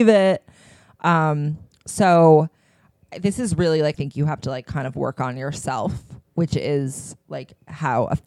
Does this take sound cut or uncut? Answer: cut